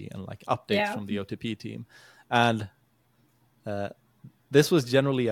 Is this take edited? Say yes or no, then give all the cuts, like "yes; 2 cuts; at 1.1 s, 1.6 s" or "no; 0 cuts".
no; 0 cuts